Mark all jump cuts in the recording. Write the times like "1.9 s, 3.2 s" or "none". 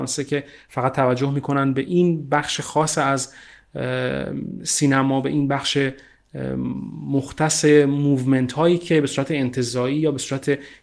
none